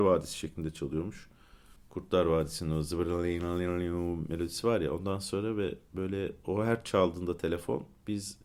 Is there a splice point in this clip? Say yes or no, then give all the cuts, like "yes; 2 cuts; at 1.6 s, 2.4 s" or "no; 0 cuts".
yes; 1 cut; at 1.8 s